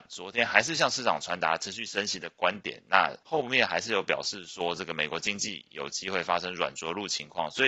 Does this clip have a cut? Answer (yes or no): yes